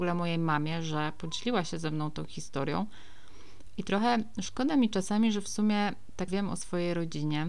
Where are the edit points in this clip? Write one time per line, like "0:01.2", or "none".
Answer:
0:06.3

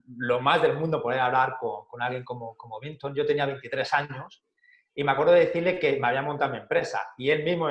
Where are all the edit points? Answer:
none

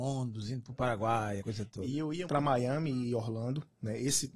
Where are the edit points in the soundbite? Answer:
0:01.4
0:02.3

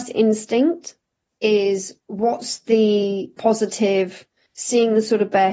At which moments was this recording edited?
0:02.0
0:04.5

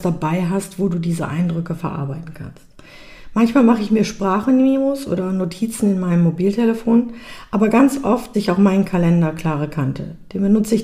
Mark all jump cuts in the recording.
0:08.3

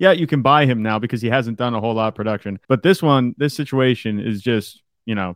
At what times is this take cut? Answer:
0:02.6

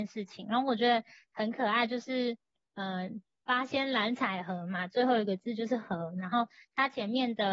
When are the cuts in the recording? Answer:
none

